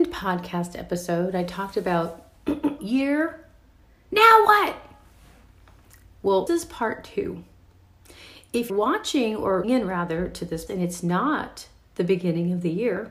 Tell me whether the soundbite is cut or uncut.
cut